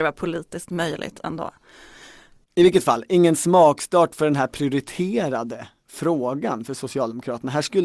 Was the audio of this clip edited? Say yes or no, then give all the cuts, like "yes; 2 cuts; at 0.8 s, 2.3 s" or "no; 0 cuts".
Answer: no; 0 cuts